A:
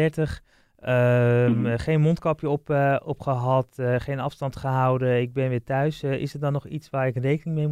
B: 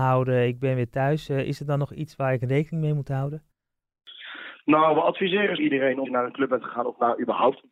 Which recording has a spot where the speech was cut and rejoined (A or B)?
B